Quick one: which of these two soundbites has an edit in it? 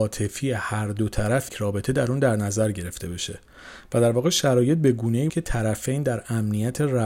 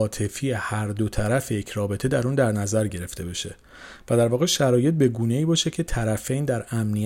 first; 2 cuts; at 1.5 s, 5.3 s

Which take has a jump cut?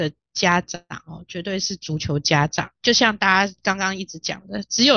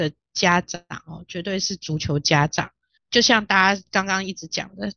first; 1 cut; at 2.8 s

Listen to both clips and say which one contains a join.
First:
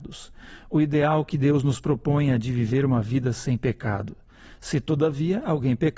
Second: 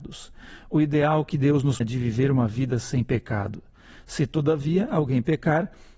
second; 1 cut; at 1.8 s

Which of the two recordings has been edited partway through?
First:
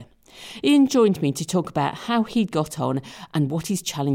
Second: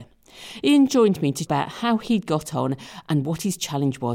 second; 1 cut; at 1.5 s

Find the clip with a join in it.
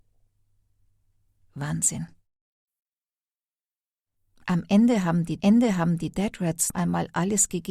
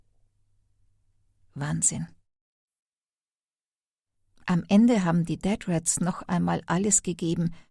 first; 2 cuts; at 5.4 s, 6.7 s

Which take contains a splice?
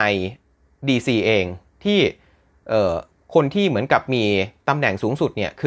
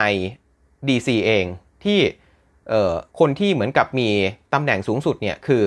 second; 1 cut; at 3.1 s

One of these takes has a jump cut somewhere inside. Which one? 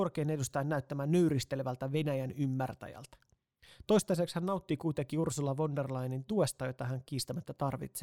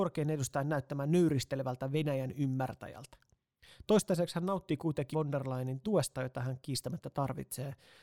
second; 1 cut; at 5.1 s

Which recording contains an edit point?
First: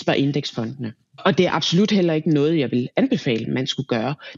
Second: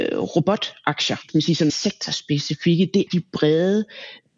second; 3 cuts; at 1.3 s, 1.7 s, 3.1 s

